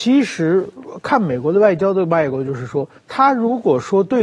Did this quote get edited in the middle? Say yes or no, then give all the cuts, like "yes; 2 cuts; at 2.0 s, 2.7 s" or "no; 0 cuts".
yes; 1 cut; at 3.0 s